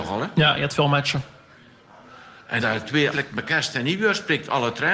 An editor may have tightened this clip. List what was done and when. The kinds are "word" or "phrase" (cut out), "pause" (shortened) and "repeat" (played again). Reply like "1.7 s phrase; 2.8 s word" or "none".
2.6 s word; 3.1 s word